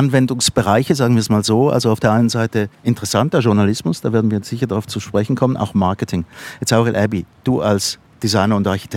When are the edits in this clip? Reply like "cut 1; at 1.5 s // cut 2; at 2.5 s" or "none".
cut 1; at 2.7 s // cut 2; at 8.0 s